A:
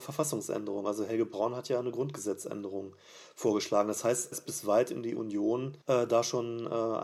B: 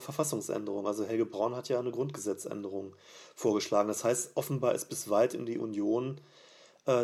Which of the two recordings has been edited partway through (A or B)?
A